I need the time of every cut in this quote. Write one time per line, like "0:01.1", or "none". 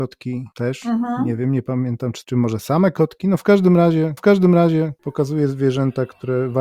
0:02.2
0:04.2